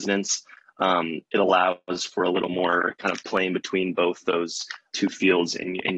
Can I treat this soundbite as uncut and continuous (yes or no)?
no